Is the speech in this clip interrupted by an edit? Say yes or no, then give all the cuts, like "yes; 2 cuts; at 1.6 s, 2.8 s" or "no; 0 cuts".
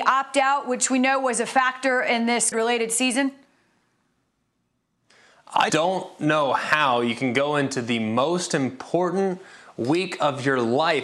yes; 2 cuts; at 2.5 s, 5.7 s